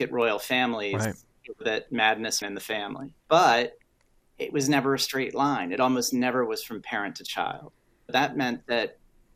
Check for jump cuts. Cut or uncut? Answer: cut